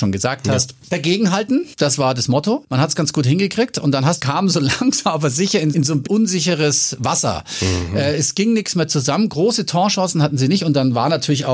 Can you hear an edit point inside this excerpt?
yes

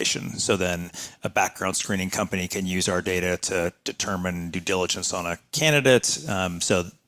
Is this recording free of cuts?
yes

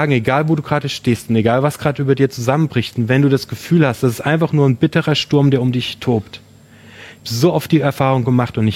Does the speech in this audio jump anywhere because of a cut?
yes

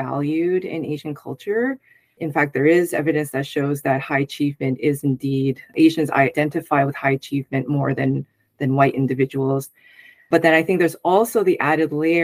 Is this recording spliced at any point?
no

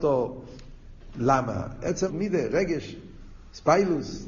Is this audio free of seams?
no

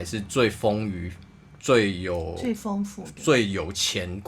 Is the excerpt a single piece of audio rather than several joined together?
yes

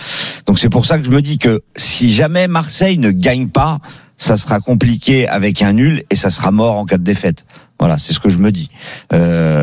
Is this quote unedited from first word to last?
yes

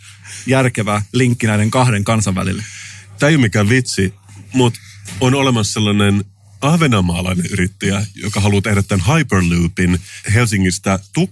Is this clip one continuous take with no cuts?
yes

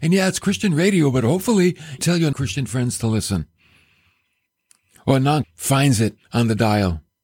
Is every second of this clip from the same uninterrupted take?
no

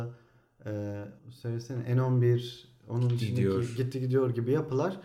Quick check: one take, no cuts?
no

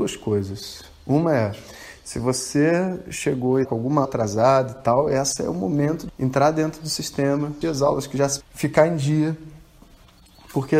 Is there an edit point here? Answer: yes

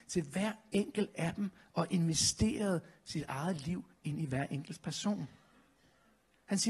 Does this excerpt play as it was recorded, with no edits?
yes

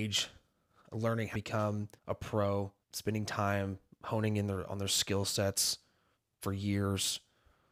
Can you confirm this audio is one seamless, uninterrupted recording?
no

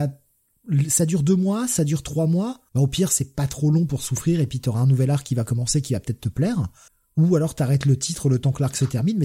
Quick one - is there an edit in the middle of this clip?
yes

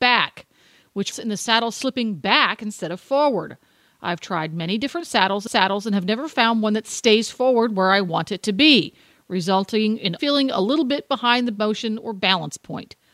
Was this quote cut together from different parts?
yes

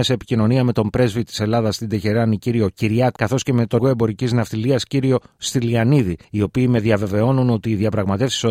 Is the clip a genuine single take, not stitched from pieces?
no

